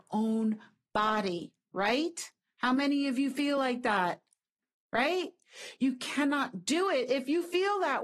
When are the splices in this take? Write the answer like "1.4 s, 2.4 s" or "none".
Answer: none